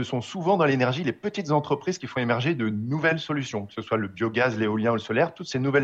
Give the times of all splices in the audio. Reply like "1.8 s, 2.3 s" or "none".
none